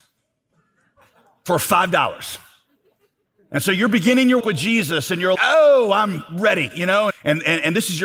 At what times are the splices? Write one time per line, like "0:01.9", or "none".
0:04.4
0:05.3
0:07.1